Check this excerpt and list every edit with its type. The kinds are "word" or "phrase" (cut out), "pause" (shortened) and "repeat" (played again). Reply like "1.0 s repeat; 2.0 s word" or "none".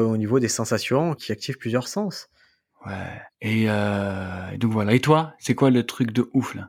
1.1 s word; 3.3 s pause